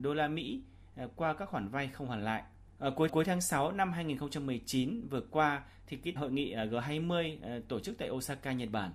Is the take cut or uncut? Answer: cut